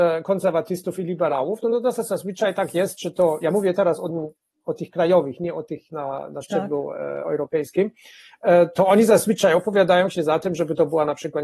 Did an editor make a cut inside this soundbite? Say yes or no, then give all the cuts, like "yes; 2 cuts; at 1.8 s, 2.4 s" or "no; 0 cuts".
no; 0 cuts